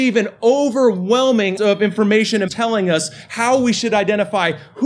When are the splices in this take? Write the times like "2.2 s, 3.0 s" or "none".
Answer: 1.6 s, 2.5 s